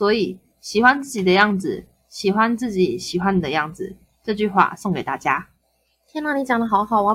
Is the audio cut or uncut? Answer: uncut